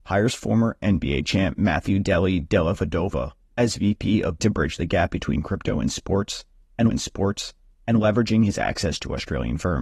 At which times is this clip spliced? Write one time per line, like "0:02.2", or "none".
0:04.4
0:06.9